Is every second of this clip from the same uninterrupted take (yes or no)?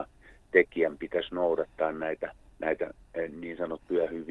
no